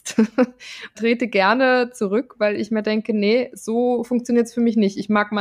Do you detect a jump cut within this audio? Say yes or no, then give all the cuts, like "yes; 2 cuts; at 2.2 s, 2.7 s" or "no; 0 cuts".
yes; 1 cut; at 0.9 s